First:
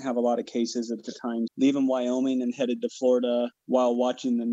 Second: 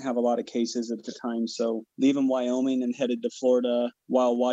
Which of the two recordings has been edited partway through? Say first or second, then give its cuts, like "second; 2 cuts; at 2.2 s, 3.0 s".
first; 1 cut; at 1.5 s